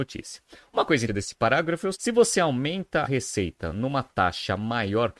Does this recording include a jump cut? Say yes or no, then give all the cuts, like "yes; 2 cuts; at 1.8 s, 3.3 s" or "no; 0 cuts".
yes; 3 cuts; at 1.1 s, 1.9 s, 3.0 s